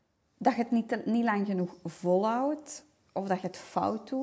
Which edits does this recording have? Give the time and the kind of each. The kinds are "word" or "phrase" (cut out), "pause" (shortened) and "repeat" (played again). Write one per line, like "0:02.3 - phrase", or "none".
none